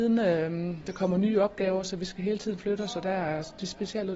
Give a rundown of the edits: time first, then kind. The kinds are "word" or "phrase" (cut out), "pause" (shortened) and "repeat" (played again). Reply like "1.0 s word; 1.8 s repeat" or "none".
none